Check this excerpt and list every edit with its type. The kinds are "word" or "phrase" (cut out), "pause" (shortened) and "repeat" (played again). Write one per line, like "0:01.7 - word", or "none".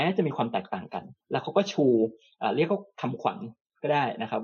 0:01.2 - pause